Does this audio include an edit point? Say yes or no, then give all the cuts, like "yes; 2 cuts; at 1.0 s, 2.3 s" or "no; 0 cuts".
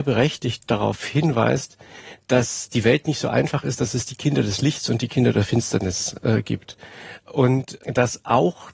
no; 0 cuts